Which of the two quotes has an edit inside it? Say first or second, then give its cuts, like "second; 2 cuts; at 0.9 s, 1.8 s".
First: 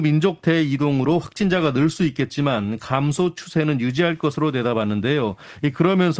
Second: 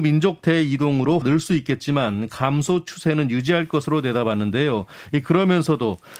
second; 1 cut; at 1.2 s